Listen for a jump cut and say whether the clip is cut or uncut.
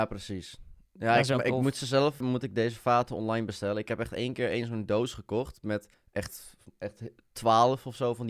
cut